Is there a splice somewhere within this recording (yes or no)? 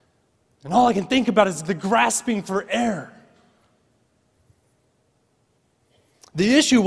no